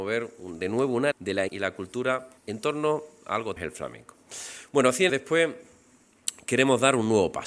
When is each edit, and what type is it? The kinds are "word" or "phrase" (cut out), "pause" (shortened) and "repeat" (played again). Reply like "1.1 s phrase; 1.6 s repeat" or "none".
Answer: 1.1 s word; 1.5 s word; 2.4 s pause; 3.6 s phrase; 5.1 s word